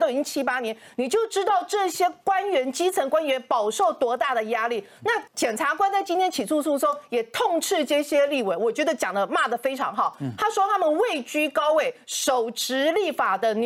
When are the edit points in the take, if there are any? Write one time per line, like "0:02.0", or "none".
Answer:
0:05.3